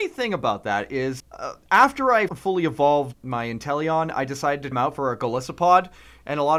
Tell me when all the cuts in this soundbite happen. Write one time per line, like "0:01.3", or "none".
0:01.2
0:02.3
0:03.1
0:04.7